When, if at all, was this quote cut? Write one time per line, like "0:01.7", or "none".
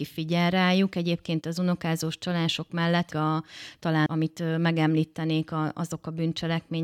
0:01.4
0:03.1
0:04.1